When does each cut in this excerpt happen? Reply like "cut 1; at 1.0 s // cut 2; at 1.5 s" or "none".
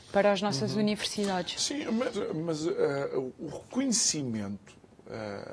cut 1; at 2.1 s